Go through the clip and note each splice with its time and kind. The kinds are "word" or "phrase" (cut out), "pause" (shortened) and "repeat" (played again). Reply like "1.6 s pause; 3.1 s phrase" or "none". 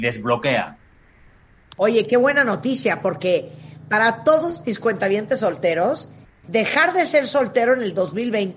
none